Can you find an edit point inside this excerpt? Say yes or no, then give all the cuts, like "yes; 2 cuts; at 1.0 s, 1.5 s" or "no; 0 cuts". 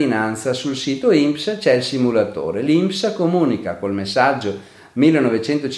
no; 0 cuts